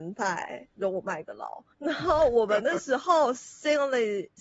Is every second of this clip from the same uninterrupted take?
no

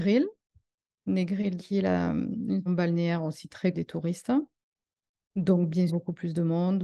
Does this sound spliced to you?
yes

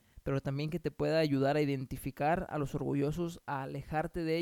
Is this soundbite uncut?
yes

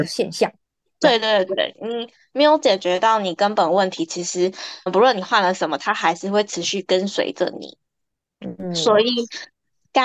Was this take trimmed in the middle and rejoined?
yes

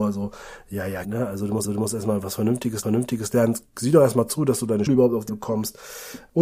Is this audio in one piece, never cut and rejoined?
no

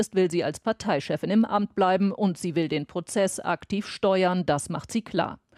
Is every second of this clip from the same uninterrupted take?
yes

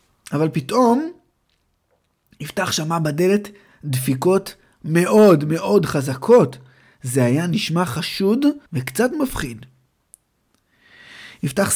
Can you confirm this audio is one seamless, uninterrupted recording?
no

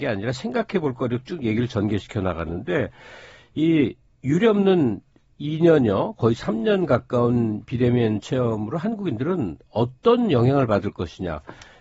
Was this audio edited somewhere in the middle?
no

